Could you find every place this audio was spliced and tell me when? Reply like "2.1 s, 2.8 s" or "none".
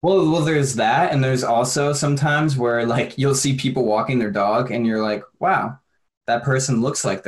none

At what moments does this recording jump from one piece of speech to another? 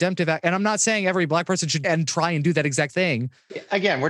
1.8 s, 2.9 s

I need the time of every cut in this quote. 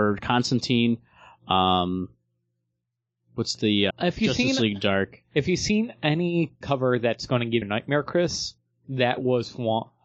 3.9 s, 6.6 s, 7.6 s

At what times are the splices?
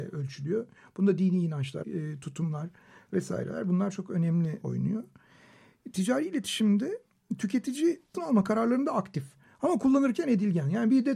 1.8 s, 4.6 s, 8.1 s

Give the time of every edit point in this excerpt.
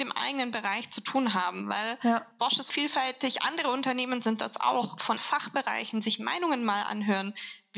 2.7 s, 5.2 s

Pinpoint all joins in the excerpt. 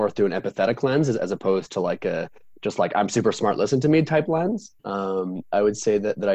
4.8 s

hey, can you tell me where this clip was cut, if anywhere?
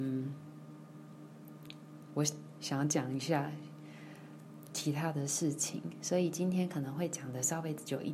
2.1 s

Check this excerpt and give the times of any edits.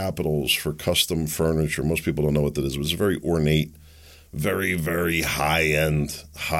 none

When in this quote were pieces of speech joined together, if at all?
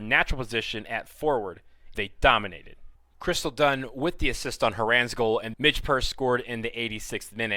2.0 s, 3.0 s, 5.5 s

